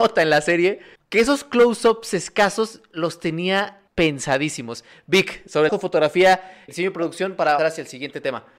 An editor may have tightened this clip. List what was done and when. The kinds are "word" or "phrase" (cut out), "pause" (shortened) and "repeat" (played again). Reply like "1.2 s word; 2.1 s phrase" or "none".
1.0 s pause; 3.9 s pause; 5.7 s phrase; 6.7 s word; 7.6 s word